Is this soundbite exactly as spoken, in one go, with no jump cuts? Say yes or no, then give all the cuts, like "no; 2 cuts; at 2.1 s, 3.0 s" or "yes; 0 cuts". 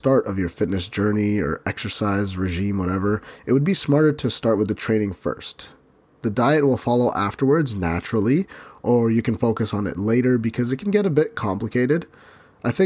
yes; 0 cuts